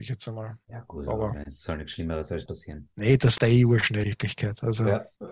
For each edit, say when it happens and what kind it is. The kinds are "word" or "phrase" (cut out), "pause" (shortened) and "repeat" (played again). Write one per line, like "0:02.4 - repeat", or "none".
0:02.5 - word
0:03.4 - word
0:04.0 - word